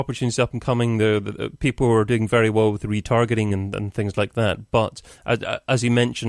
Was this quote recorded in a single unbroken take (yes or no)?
yes